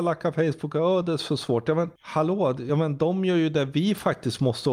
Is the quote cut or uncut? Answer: uncut